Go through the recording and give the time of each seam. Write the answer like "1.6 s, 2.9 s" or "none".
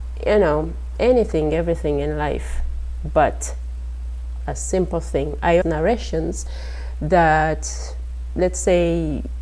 5.6 s